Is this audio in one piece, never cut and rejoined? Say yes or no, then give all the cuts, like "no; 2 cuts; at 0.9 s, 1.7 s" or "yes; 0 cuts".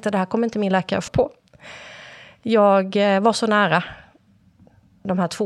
no; 1 cut; at 1.1 s